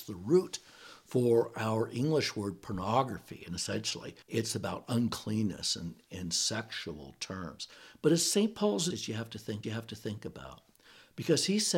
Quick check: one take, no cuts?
no; 3 cuts; at 4.2 s, 8.9 s, 9.6 s

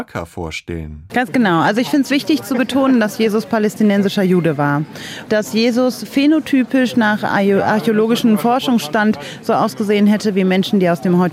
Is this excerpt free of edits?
no; 1 cut; at 5.3 s

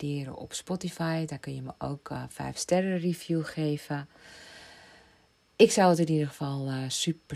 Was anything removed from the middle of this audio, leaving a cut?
no; 0 cuts

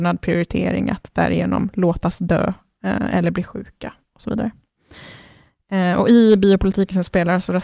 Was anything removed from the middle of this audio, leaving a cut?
no; 0 cuts

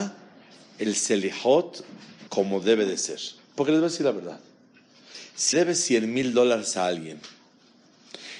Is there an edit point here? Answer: yes; 3 cuts; at 2.3 s, 3.4 s, 5.5 s

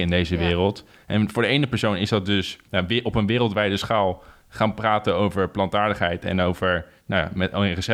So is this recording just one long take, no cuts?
no; 1 cut; at 2.7 s

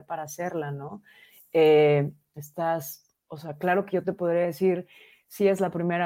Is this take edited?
no; 0 cuts

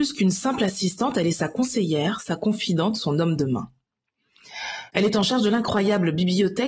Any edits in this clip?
no; 0 cuts

